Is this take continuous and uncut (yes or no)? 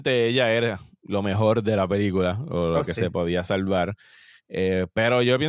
yes